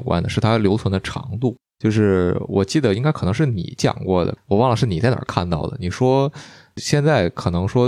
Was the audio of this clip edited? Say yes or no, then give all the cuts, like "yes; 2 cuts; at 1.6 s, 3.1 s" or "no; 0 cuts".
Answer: no; 0 cuts